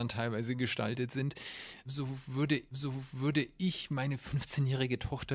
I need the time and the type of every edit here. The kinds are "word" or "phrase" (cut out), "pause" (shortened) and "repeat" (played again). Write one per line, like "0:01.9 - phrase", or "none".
0:02.7 - repeat